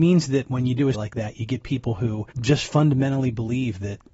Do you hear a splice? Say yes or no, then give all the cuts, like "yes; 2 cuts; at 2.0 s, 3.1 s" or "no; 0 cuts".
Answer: yes; 2 cuts; at 0.9 s, 2.3 s